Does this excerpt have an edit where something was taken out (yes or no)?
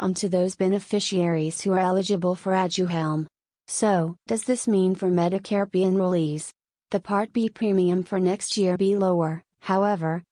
yes